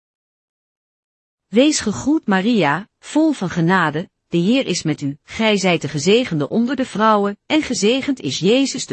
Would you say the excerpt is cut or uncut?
cut